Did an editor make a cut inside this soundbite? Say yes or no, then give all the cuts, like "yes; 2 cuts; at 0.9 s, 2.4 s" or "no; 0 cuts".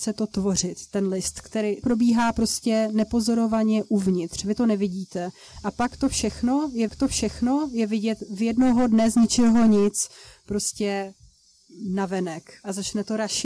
yes; 2 cuts; at 1.8 s, 6.9 s